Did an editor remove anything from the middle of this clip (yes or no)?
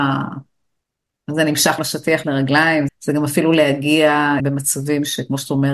yes